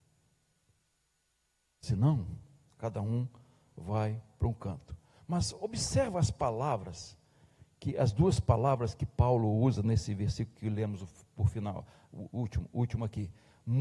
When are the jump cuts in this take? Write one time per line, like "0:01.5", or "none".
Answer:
none

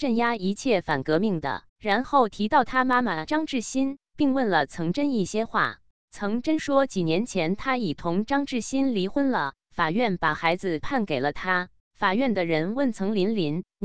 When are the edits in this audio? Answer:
0:01.7
0:06.0
0:11.8

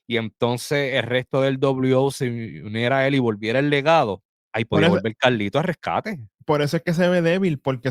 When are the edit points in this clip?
0:04.4

